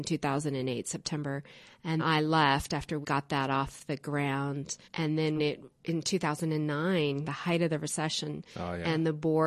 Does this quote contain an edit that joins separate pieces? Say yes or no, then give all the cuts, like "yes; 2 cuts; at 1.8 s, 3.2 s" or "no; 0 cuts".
yes; 7 cuts; at 2.0 s, 3.0 s, 4.8 s, 5.4 s, 5.7 s, 7.2 s, 8.5 s